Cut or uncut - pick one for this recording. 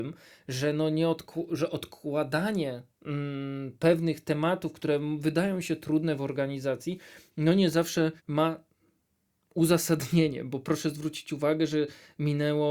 cut